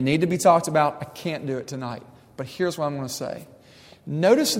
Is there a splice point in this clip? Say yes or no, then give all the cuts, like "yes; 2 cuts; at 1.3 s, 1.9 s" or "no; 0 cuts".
no; 0 cuts